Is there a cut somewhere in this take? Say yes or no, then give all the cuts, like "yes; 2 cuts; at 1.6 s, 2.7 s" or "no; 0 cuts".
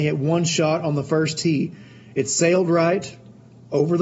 no; 0 cuts